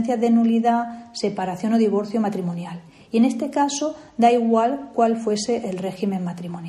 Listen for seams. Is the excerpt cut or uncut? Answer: uncut